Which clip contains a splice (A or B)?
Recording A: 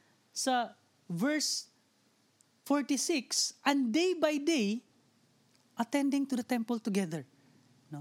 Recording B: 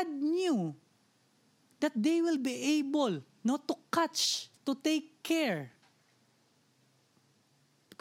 B